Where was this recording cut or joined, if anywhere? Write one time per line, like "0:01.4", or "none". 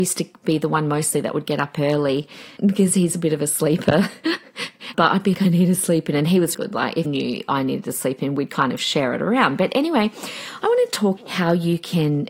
0:02.6
0:04.9
0:05.3
0:06.5
0:07.0
0:11.2